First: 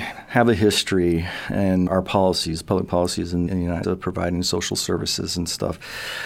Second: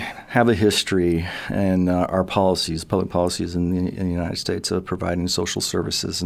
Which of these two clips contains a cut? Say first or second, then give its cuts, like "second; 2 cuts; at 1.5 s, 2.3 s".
first; 3 cuts; at 1.9 s, 3.5 s, 3.8 s